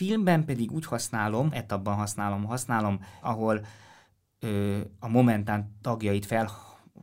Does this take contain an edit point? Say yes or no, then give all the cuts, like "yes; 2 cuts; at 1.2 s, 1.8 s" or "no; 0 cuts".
yes; 2 cuts; at 1.5 s, 3.2 s